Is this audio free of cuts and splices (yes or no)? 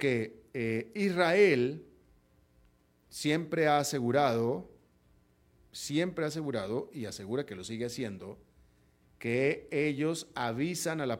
yes